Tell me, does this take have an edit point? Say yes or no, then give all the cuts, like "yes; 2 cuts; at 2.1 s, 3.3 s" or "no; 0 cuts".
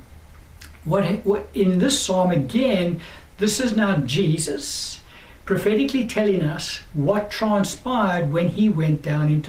no; 0 cuts